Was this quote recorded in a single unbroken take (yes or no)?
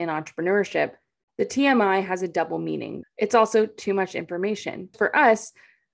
no